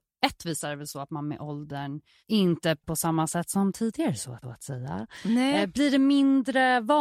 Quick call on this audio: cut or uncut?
cut